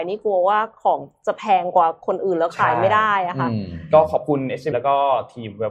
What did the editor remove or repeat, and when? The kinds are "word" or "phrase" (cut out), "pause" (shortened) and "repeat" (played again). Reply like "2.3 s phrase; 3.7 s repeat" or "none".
4.7 s word